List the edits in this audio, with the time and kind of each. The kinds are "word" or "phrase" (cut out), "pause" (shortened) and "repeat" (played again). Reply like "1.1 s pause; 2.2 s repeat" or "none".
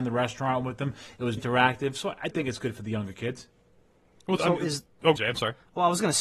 1.4 s word; 2.3 s word; 4.4 s word; 5.2 s word